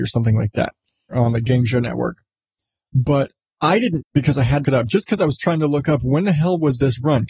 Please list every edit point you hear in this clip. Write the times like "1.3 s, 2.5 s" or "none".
1.1 s, 4.0 s, 4.6 s